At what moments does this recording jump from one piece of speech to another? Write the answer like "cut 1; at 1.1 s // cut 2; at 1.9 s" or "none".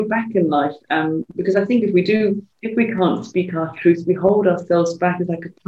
cut 1; at 2.5 s